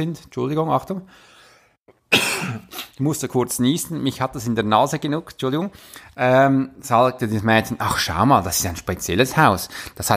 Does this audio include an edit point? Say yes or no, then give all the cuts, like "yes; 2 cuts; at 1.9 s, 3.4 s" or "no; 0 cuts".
no; 0 cuts